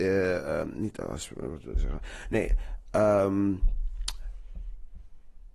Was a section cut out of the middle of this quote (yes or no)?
no